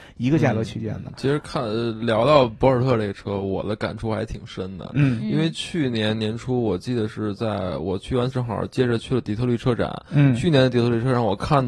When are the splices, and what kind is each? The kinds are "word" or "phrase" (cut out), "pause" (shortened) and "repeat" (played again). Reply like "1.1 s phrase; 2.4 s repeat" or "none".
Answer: 8.3 s word